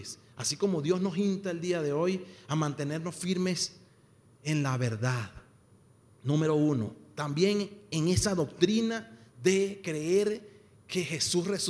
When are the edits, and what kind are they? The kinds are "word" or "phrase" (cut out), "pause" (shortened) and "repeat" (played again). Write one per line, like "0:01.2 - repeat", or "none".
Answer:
none